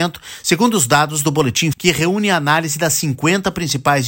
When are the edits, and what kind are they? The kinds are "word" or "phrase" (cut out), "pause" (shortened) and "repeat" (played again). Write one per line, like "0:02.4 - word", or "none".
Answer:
0:01.7 - word